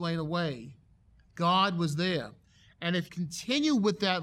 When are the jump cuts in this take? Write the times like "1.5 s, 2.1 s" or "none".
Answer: 3.1 s